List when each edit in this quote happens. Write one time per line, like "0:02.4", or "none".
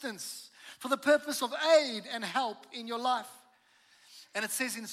none

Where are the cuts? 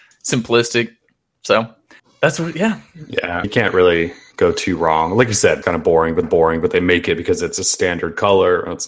0:02.0
0:03.4
0:05.6
0:06.2

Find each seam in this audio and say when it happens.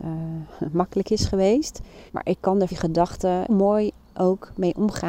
0:02.1
0:02.7
0:03.5

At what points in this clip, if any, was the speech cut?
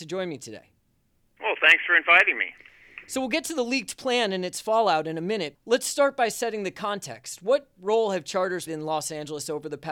0:05.5
0:08.7

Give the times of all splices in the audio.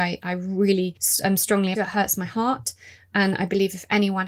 0:01.7

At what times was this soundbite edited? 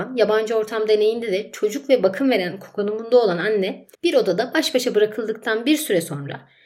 0:03.9

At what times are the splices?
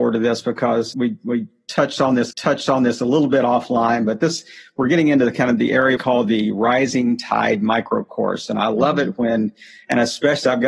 0:00.9
0:02.3
0:06.0

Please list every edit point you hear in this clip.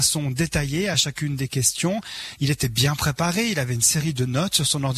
none

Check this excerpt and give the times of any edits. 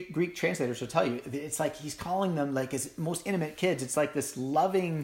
none

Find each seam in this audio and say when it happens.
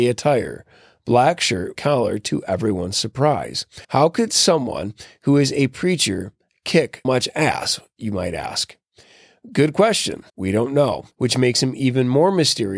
0:01.8
0:03.8
0:07.0
0:10.3
0:11.1

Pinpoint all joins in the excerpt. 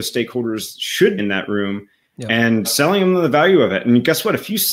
0:01.2
0:02.6

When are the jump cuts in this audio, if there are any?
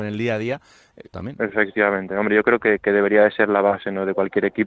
0:01.1

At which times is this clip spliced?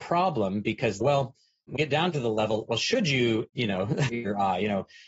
0:01.0
0:01.8
0:02.7
0:03.5
0:04.1

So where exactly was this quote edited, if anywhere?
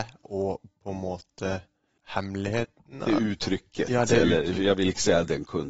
0:02.0

